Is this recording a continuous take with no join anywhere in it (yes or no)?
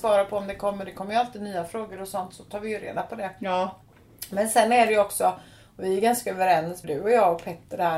no